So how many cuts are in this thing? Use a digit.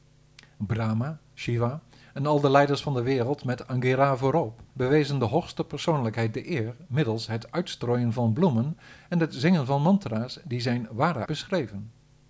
2